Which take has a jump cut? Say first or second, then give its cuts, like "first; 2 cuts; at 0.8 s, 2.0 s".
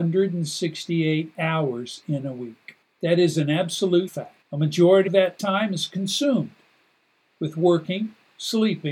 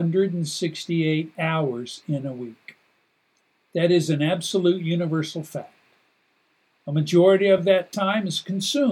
first; 4 cuts; at 2.8 s, 4.1 s, 4.4 s, 5.1 s